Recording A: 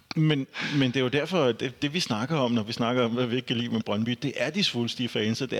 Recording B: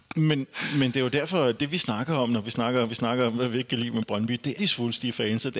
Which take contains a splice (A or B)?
B